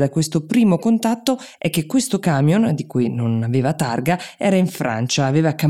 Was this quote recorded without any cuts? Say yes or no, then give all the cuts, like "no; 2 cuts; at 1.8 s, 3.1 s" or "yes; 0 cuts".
yes; 0 cuts